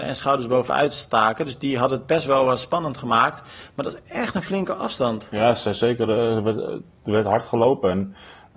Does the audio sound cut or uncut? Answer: uncut